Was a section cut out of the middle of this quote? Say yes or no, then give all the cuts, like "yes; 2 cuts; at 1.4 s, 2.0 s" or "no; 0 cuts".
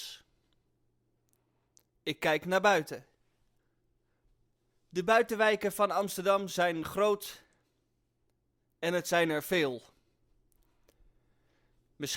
no; 0 cuts